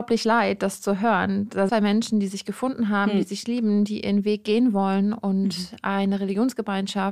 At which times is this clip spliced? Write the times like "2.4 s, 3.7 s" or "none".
1.7 s